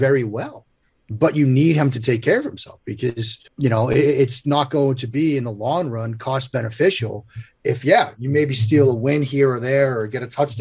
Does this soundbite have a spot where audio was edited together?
yes; 1 cut; at 3.5 s

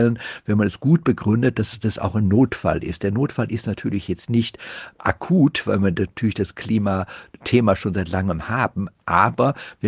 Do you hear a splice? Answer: no; 0 cuts

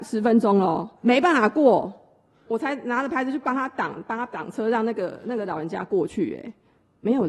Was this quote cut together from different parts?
no; 0 cuts

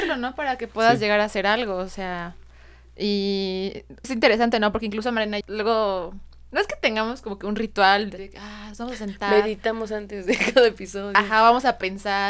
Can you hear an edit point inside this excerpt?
yes; 3 cuts; at 4.0 s, 5.4 s, 8.2 s

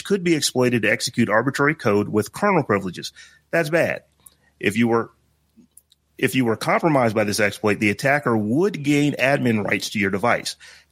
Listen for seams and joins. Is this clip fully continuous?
yes; 0 cuts

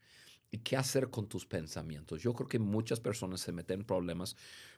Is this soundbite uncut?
yes; 0 cuts

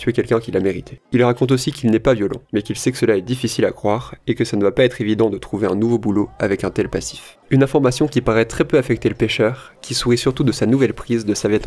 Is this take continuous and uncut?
no; 3 cuts; at 1.1 s, 2.4 s, 7.4 s

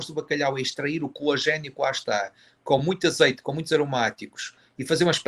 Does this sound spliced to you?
no; 0 cuts

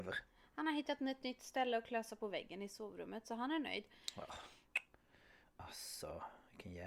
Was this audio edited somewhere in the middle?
no; 0 cuts

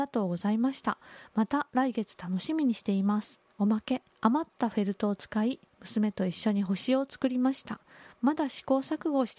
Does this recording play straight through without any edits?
no; 2 cuts; at 3.5 s, 4.1 s

